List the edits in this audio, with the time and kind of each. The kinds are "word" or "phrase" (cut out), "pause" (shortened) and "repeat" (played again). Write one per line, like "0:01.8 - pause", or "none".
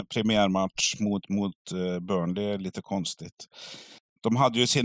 none